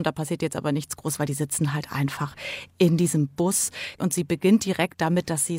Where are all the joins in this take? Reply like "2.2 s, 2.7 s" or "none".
none